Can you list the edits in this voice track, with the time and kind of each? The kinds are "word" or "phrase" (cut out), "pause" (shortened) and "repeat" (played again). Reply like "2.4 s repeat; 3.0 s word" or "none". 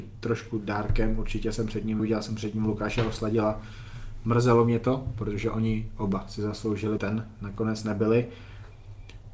2.0 s phrase; 7.0 s phrase